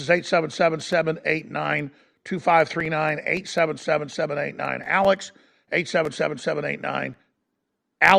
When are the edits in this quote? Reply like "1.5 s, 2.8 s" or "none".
none